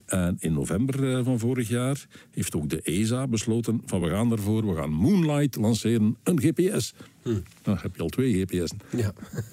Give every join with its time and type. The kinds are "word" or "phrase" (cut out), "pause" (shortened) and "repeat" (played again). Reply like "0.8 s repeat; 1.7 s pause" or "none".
none